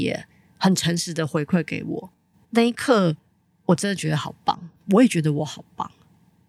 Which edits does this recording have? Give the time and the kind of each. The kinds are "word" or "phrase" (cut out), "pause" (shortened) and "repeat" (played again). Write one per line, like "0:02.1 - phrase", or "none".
none